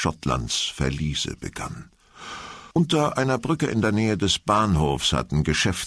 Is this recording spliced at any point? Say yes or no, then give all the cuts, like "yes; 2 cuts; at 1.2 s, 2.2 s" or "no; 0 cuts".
yes; 1 cut; at 2.7 s